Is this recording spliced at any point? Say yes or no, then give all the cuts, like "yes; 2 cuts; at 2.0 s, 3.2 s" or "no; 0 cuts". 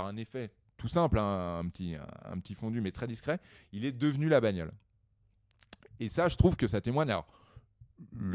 no; 0 cuts